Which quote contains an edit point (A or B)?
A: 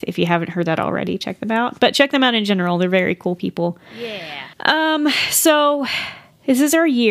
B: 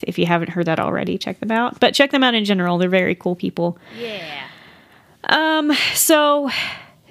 A